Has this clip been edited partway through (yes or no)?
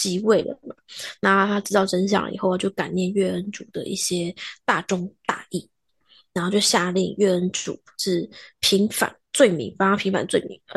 no